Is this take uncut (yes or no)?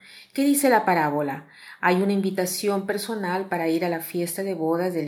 yes